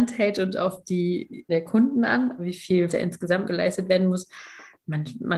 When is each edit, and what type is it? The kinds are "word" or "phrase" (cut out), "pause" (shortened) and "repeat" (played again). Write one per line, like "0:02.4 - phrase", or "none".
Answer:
0:01.5 - word
0:02.4 - word
0:02.9 - word
0:03.4 - word